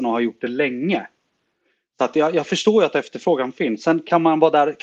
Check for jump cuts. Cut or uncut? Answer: uncut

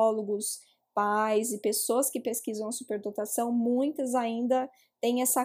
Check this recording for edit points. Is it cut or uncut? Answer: uncut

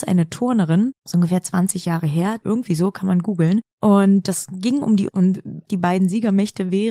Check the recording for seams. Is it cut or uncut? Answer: cut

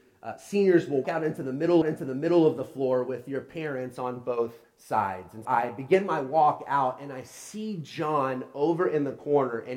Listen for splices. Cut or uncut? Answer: cut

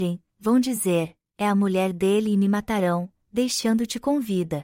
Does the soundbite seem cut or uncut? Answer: uncut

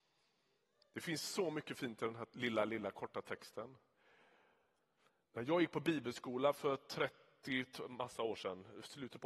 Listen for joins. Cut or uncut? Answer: uncut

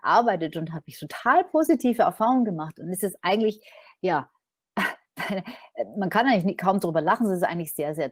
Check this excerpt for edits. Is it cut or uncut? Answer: cut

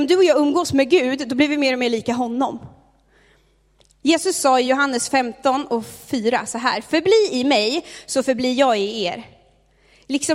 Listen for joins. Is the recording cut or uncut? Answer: uncut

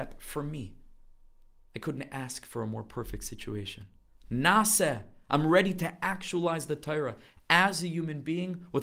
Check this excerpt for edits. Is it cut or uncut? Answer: uncut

